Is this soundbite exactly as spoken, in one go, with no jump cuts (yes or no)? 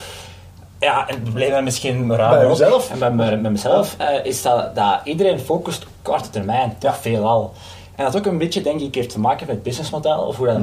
yes